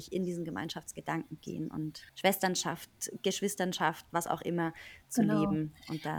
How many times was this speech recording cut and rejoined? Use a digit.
3